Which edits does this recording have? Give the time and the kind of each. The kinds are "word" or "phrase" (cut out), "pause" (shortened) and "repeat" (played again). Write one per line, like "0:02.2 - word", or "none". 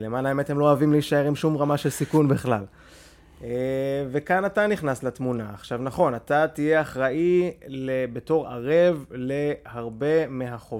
none